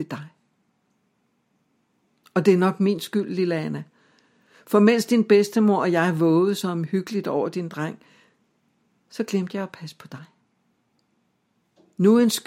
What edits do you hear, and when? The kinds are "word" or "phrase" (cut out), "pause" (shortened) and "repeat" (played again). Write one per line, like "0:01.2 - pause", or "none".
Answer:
none